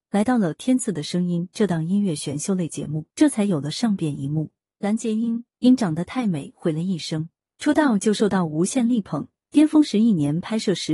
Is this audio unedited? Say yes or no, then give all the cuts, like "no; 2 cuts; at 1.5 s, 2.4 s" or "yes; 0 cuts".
no; 1 cut; at 3.1 s